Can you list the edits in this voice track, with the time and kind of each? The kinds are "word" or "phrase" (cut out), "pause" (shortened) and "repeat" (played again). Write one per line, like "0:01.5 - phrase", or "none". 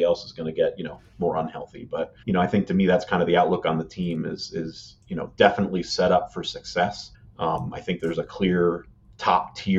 0:02.2 - pause
0:07.1 - pause